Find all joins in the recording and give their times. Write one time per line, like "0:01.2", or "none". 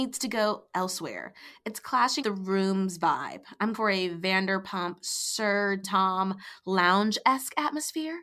0:02.2
0:03.7
0:05.8

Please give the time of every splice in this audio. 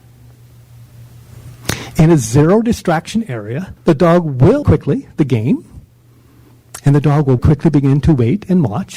0:03.8
0:04.6
0:07.4

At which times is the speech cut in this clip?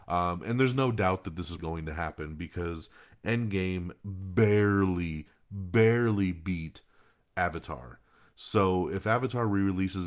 0:01.6

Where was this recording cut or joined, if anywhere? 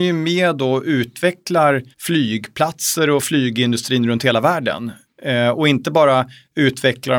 0:01.9

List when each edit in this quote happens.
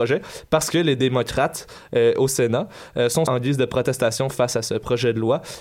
0:03.3

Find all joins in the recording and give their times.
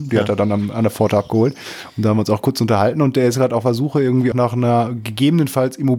0:04.3

